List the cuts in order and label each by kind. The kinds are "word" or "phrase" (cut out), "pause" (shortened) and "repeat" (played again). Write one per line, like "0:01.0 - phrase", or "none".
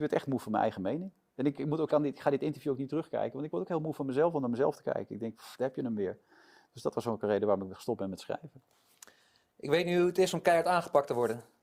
0:01.9 - phrase